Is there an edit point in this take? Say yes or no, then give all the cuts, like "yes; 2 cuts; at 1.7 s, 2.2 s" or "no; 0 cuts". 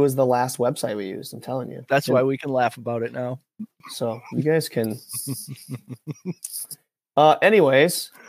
no; 0 cuts